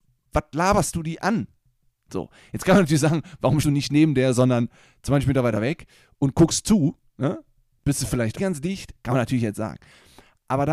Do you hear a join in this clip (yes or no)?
yes